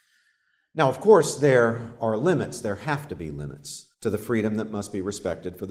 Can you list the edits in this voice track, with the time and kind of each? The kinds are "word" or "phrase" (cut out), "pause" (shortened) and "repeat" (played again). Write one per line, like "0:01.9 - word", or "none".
0:03.9 - pause